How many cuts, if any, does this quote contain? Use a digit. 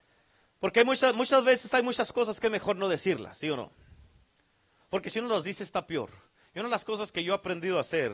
0